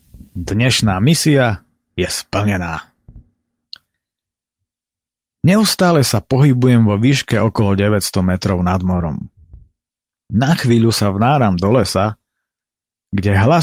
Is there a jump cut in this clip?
no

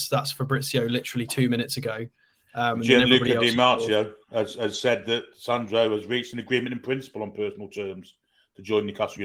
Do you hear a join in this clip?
no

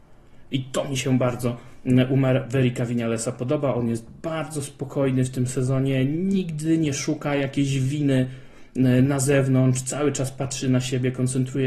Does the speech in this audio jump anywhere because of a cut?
no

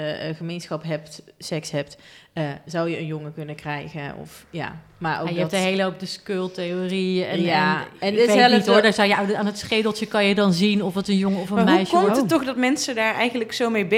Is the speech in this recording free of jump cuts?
yes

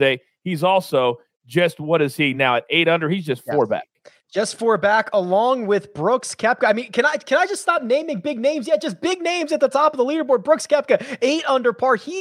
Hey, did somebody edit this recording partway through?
no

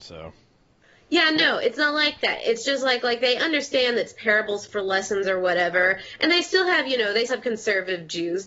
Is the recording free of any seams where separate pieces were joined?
no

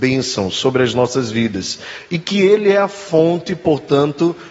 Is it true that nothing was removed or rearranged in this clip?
yes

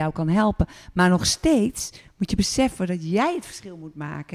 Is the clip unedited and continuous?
yes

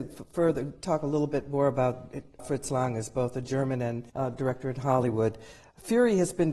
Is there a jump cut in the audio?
yes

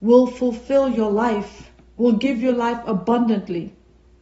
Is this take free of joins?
yes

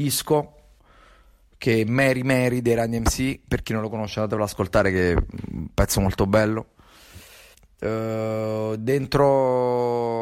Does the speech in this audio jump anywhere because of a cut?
no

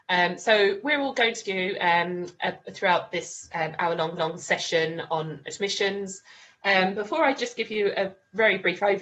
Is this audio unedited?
no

